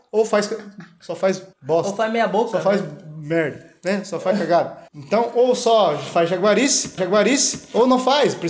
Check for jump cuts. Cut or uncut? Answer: cut